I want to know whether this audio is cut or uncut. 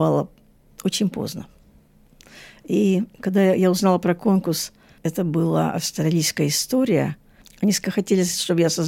uncut